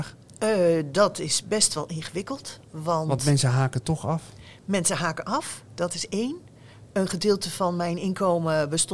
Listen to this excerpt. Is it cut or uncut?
uncut